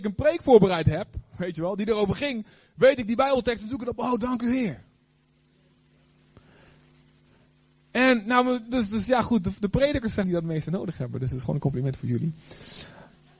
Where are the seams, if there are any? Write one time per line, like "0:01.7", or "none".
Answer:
0:10.2